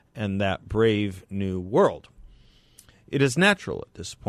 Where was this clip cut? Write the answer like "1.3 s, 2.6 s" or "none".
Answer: none